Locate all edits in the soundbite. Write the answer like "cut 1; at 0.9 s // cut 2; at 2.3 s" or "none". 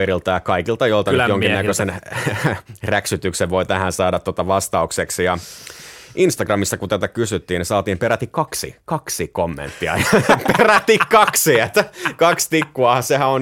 none